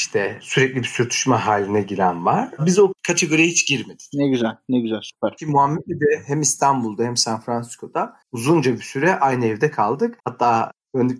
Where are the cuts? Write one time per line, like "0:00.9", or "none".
0:08.2
0:10.2